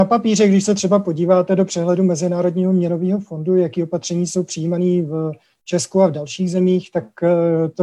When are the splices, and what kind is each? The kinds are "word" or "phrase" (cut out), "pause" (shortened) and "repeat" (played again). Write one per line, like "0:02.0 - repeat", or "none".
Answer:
none